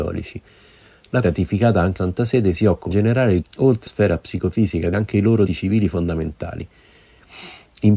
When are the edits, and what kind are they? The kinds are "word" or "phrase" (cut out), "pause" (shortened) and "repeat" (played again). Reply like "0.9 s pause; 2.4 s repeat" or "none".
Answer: 1.2 s word; 2.0 s word; 2.9 s word; 3.4 s word; 3.9 s word; 4.9 s word; 5.5 s word